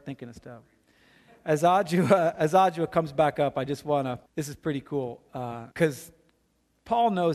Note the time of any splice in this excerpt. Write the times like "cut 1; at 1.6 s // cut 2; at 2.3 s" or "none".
cut 1; at 4.3 s // cut 2; at 5.7 s